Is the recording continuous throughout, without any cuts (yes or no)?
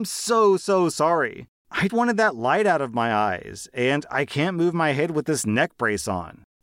no